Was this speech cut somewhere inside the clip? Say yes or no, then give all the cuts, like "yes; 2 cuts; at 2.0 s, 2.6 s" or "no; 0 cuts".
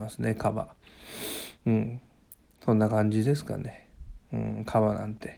no; 0 cuts